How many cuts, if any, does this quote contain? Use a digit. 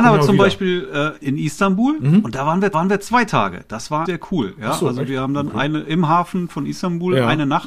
3